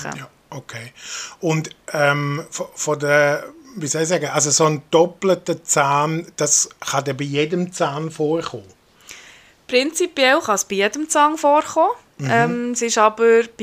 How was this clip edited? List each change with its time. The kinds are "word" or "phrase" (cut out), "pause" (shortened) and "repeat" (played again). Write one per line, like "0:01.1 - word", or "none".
none

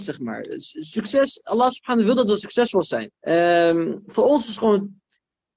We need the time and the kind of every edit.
0:03.2 - pause

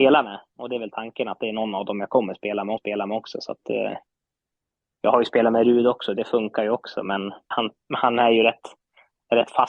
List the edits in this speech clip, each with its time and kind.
0:02.8 - repeat
0:07.5 - word

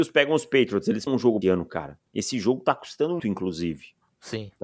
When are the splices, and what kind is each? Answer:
0:01.1 - word
0:01.4 - phrase
0:02.1 - pause
0:03.2 - word

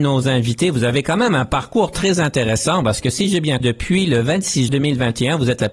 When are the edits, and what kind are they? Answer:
0:03.6 - word
0:04.7 - word

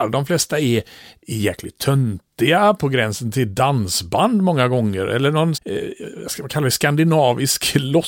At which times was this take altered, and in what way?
0:05.5 - word

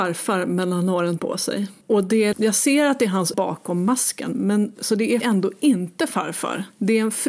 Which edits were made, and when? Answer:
0:01.2 - word
0:01.8 - pause
0:02.3 - word
0:03.3 - word
0:05.2 - phrase

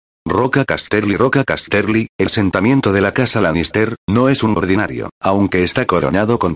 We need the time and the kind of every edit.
0:02.3 - word
0:04.6 - word
0:05.1 - pause

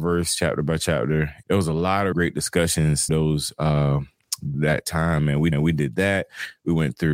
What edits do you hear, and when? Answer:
0:01.4 - word
0:02.1 - word
0:03.1 - word
0:04.5 - word
0:05.5 - repeat

